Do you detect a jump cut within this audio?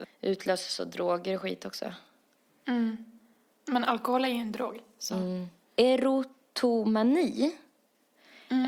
no; 0 cuts

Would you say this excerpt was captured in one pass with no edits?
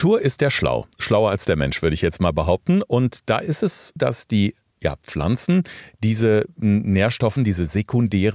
no; 2 cuts; at 4.0 s, 7.4 s

